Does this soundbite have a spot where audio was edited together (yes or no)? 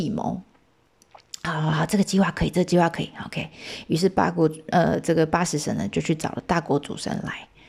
no